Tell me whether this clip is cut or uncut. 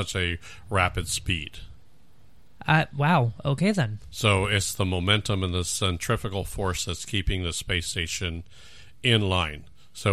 uncut